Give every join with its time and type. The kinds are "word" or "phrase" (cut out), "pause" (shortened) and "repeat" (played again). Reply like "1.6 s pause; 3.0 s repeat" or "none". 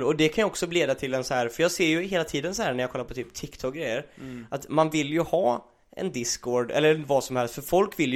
none